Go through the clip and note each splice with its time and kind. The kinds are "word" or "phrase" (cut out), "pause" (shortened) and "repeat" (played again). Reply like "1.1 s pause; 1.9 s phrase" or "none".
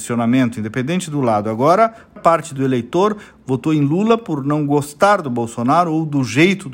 none